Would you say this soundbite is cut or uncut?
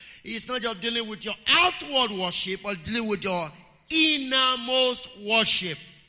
uncut